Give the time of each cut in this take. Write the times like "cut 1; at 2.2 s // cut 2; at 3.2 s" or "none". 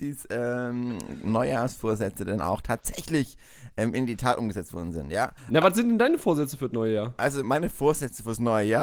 cut 1; at 5.4 s // cut 2; at 7.4 s